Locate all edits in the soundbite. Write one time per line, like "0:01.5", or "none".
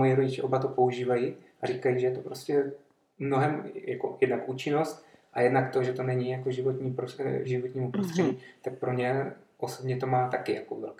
0:07.4

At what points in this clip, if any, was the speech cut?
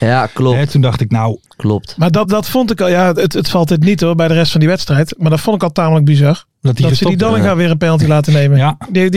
0:01.5
0:02.2
0:06.5

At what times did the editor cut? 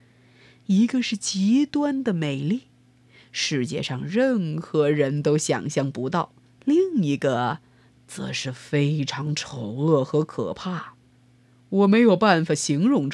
0:06.4

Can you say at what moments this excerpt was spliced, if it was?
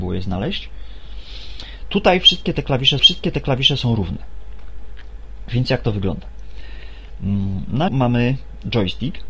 0:03.0
0:07.9

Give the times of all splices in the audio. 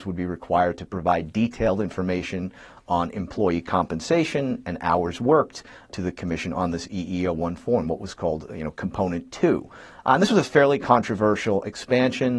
none

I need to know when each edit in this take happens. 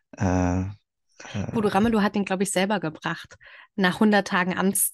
none

